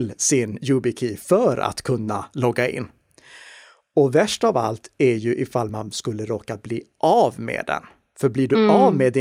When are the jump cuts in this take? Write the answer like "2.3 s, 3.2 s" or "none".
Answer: none